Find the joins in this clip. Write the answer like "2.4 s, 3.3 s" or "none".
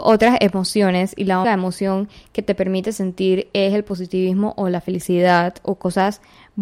1.4 s